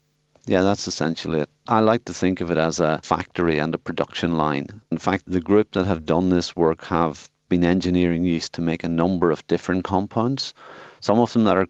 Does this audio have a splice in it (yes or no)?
yes